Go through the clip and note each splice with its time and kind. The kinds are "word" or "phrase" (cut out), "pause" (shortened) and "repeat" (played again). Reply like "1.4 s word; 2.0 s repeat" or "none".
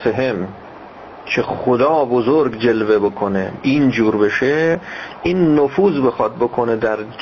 3.6 s word